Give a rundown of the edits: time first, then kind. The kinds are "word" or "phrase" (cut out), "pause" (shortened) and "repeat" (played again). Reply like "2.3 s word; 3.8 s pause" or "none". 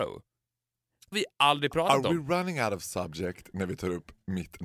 1.1 s word